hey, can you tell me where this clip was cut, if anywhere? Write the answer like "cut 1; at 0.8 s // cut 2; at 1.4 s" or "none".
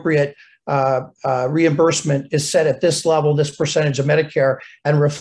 none